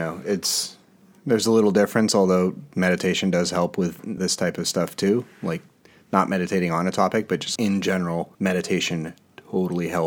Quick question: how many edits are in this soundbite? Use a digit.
3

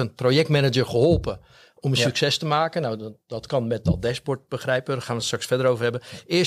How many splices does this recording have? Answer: 0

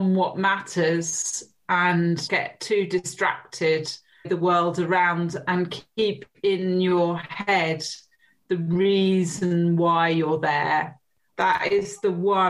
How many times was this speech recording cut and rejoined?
2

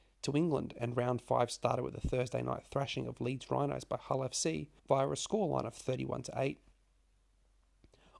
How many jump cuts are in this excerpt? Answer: 1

